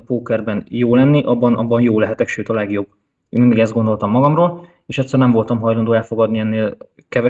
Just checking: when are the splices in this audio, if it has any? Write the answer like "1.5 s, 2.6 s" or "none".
none